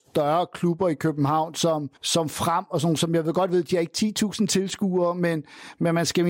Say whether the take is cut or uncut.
cut